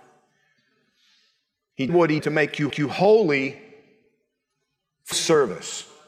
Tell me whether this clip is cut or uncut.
cut